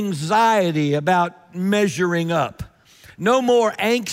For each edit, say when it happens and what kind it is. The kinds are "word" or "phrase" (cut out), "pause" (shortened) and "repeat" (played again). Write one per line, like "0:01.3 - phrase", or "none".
none